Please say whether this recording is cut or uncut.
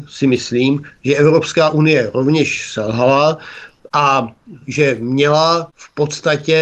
uncut